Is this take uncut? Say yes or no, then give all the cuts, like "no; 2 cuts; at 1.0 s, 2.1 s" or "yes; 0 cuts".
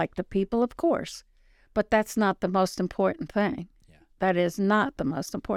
yes; 0 cuts